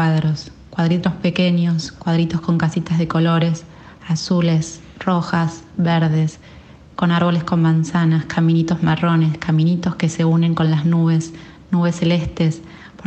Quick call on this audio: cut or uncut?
uncut